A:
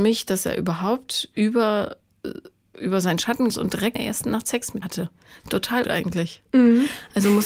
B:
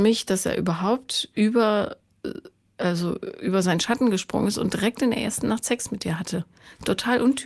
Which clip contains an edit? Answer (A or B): A